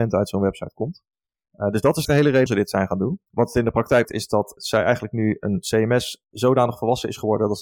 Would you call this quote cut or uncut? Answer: cut